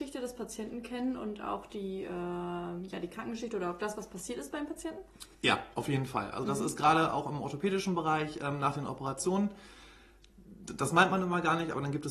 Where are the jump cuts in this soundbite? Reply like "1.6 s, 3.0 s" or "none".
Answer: 5.3 s